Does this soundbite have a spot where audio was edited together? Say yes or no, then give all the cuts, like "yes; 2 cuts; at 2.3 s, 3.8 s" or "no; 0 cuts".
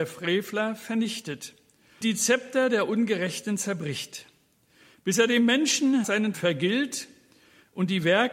yes; 3 cuts; at 2.0 s, 6.0 s, 6.3 s